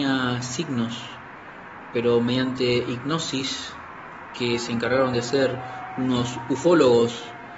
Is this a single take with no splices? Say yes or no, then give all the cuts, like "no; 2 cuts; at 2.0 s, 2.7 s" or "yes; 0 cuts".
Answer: yes; 0 cuts